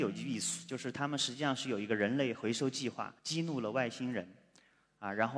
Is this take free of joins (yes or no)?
no